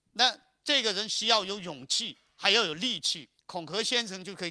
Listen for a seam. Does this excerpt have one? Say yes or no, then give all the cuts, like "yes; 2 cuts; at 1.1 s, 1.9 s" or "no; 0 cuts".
yes; 1 cut; at 3.4 s